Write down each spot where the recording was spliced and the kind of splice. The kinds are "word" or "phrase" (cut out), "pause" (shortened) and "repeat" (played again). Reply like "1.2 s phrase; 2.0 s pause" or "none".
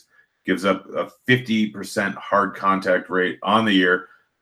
none